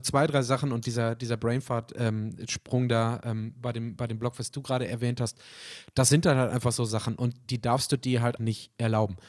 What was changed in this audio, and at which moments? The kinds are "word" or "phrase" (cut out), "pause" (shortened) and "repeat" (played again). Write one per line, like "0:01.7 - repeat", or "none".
0:08.4 - word

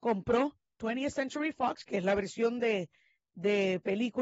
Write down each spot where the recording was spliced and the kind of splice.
none

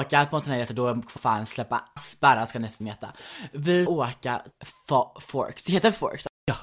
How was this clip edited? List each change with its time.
0:01.2 - word
0:02.0 - word
0:02.8 - word
0:03.9 - word
0:04.5 - word

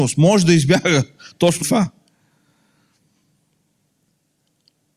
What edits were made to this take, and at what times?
0:01.6 - word

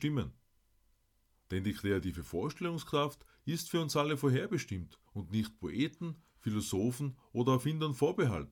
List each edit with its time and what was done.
0:05.1 - pause

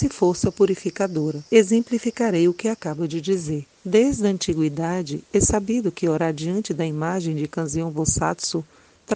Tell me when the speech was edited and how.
0:01.5 - pause
0:03.8 - pause

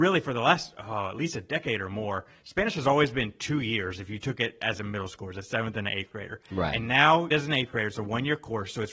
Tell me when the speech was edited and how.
0:07.3 - phrase

